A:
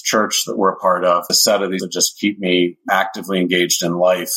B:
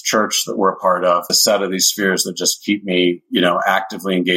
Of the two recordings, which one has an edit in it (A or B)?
A